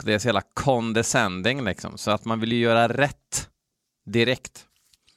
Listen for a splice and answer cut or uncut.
uncut